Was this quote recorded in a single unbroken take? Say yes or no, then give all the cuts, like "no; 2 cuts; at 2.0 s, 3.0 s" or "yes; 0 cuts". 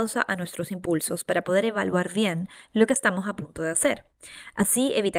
yes; 0 cuts